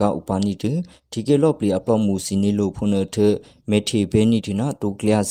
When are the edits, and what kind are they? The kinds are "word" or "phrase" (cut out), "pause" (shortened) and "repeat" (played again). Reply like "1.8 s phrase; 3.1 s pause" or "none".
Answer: 3.6 s pause